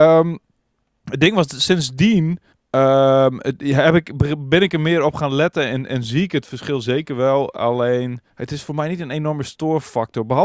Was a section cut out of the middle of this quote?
yes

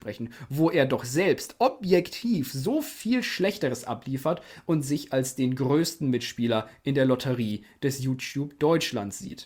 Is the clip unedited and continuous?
yes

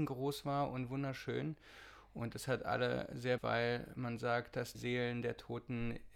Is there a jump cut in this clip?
yes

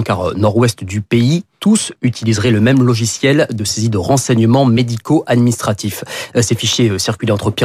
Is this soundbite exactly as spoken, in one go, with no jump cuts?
yes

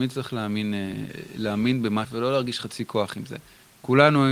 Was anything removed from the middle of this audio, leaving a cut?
yes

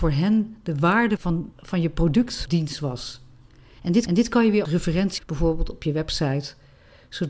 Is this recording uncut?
no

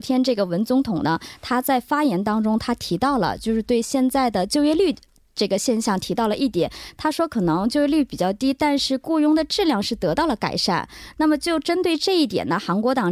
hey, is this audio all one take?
yes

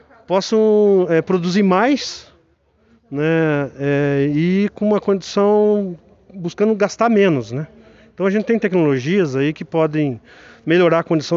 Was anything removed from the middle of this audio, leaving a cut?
no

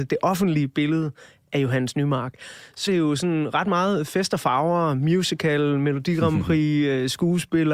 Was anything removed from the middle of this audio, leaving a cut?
yes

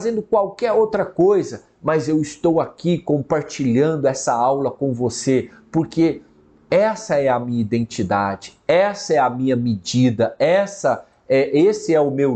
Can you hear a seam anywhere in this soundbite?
no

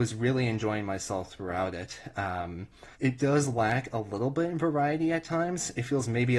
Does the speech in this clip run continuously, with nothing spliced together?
no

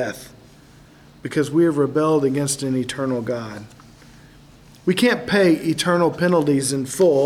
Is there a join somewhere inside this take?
no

